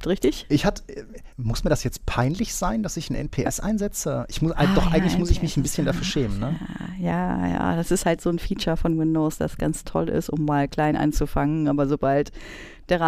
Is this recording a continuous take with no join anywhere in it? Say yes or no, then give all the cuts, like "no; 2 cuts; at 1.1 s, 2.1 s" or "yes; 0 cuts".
no; 1 cut; at 1.3 s